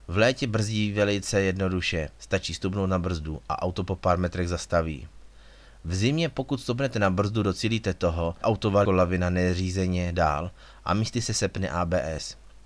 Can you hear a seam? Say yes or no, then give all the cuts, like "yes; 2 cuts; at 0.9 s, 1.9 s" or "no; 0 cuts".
yes; 3 cuts; at 2.2 s, 8.4 s, 8.9 s